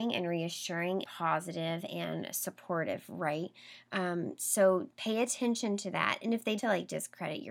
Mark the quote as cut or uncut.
cut